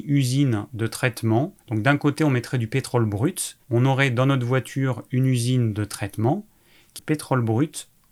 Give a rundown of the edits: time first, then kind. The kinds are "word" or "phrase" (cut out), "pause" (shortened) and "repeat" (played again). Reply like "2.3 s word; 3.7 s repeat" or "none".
1.6 s pause; 3.6 s pause; 7.0 s phrase